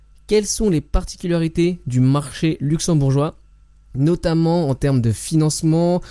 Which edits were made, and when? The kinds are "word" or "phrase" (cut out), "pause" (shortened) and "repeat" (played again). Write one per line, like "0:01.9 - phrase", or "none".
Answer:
none

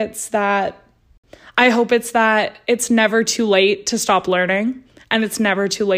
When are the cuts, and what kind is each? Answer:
none

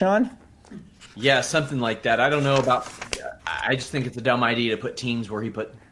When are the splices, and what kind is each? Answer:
0:03.4 - pause

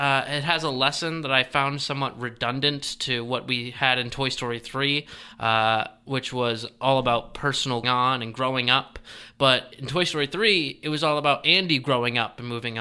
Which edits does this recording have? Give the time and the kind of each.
0:07.8 - phrase

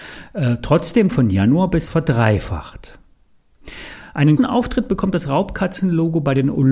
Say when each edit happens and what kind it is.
0:01.1 - phrase
0:01.9 - phrase
0:04.4 - word

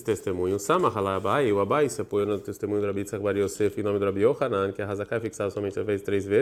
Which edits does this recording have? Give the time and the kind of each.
none

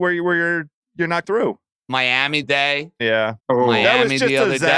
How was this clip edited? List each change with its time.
0:01.2 - word
0:02.4 - phrase
0:03.4 - pause

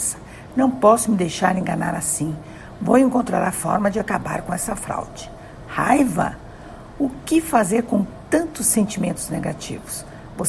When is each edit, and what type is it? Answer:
none

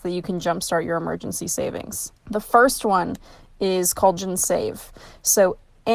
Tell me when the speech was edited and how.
0:04.2 - word

